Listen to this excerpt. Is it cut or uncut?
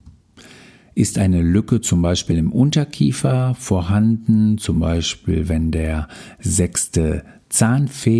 uncut